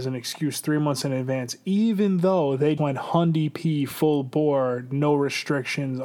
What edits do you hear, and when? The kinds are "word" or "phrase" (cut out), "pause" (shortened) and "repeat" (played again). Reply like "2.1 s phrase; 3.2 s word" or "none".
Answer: 2.8 s word